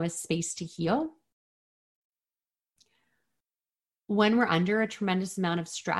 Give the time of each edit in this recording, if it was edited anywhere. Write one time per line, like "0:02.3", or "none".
none

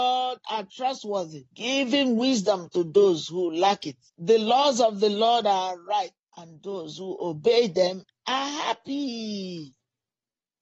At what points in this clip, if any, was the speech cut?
0:01.5
0:04.1
0:06.2

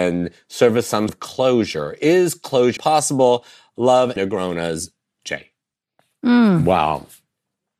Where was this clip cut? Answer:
0:01.1
0:02.8
0:04.2
0:05.8

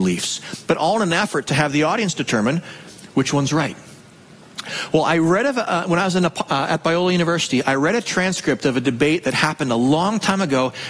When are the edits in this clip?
none

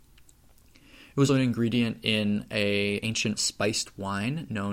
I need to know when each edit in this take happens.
0:01.3
0:03.0
0:03.4

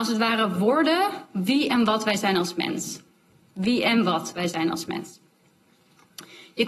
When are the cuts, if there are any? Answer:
none

